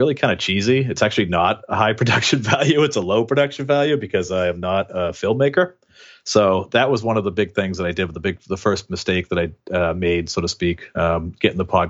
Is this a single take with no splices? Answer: yes; 0 cuts

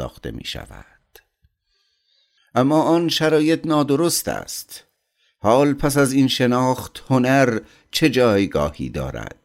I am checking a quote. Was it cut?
no; 0 cuts

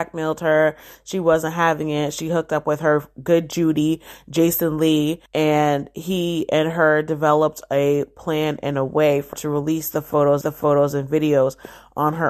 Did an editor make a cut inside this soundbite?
yes; 3 cuts; at 5.3 s, 9.3 s, 10.4 s

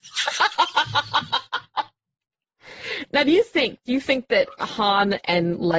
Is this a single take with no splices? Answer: yes; 0 cuts

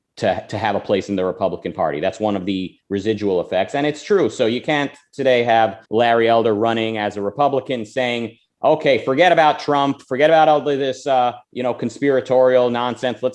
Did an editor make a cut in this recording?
yes; 2 cuts; at 5.8 s, 11.4 s

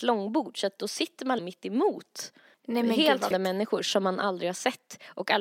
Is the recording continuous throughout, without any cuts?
no; 3 cuts; at 1.4 s, 2.5 s, 3.3 s

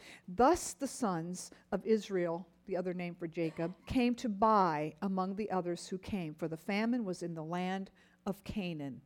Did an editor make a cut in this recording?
yes; 1 cut; at 3.8 s

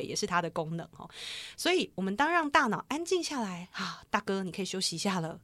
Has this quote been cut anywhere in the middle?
yes; 1 cut; at 4.1 s

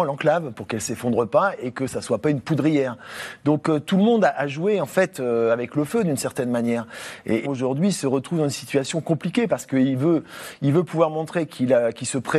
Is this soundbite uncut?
no; 1 cut; at 7.4 s

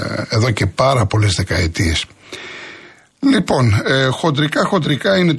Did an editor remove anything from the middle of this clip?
no; 0 cuts

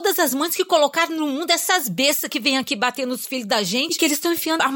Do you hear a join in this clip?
no; 0 cuts

